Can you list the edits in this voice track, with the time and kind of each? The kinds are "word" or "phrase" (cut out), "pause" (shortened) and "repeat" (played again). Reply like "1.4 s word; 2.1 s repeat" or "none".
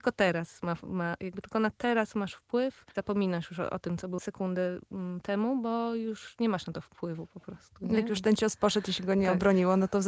2.9 s word

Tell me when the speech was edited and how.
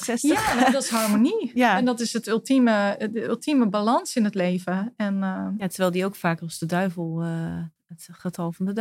none

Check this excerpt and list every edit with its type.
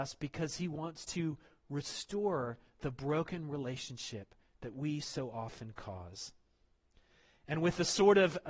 none

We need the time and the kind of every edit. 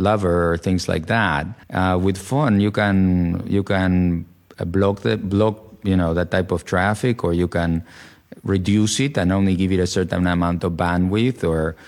1.6 s pause

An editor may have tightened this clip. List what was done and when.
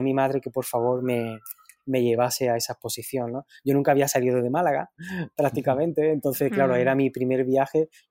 none

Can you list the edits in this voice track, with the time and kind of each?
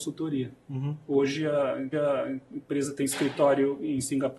1.9 s repeat

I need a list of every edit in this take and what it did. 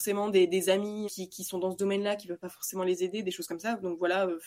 1.0 s word

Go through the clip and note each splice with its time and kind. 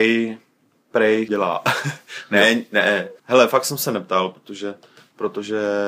1.3 s phrase; 3.2 s pause

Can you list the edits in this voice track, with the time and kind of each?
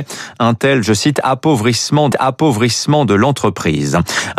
2.1 s repeat

